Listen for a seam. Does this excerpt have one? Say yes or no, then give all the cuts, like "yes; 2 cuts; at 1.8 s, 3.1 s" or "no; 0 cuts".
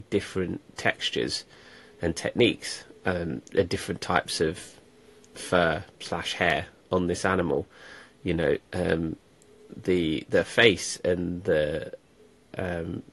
no; 0 cuts